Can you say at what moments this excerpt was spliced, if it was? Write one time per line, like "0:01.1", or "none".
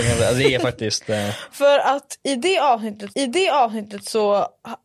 0:03.1